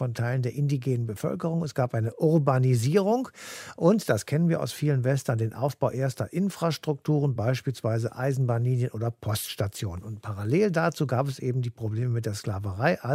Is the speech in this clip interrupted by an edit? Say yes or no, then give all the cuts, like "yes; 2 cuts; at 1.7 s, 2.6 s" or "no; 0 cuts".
no; 0 cuts